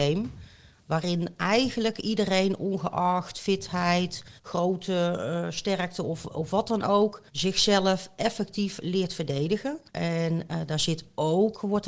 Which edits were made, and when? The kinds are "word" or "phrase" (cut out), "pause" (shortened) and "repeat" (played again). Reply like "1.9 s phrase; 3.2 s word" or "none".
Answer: 4.4 s pause; 7.3 s pause; 9.9 s pause